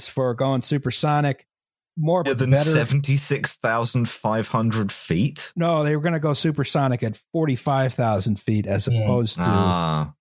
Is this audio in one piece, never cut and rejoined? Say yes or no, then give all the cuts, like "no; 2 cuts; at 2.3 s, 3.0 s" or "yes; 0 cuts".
no; 1 cut; at 2.3 s